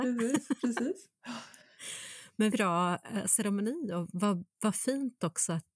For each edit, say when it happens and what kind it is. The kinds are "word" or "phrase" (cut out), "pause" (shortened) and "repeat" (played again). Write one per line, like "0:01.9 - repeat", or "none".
0:02.5 - word